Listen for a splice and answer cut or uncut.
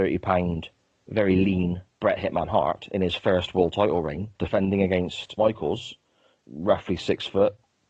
cut